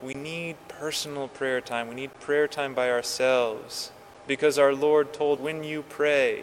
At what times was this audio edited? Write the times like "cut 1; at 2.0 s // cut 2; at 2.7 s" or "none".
cut 1; at 5.4 s